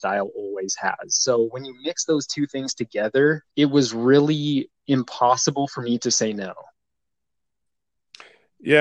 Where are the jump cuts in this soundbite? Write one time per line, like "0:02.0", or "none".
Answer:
0:03.5
0:04.8